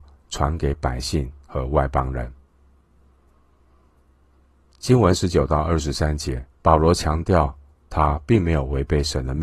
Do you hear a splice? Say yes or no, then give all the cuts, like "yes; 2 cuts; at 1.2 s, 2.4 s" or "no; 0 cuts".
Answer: yes; 1 cut; at 6.5 s